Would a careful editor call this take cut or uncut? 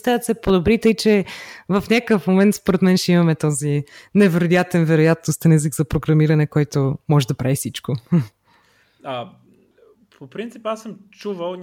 uncut